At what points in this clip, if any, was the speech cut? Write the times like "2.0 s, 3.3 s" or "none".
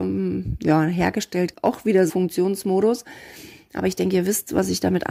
1.5 s, 2.1 s